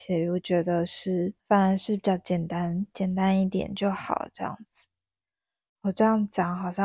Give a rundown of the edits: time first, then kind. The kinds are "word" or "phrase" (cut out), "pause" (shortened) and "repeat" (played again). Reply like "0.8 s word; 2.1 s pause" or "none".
1.4 s pause